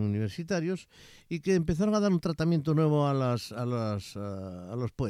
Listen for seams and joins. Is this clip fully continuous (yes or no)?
yes